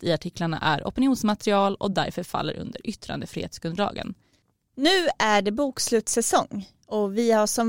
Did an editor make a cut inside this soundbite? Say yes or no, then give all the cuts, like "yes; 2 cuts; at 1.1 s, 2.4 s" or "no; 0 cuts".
no; 0 cuts